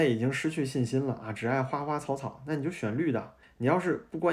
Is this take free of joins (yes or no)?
no